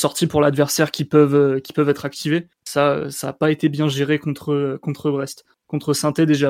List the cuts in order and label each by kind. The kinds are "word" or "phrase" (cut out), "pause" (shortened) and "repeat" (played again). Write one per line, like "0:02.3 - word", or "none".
0:02.5 - pause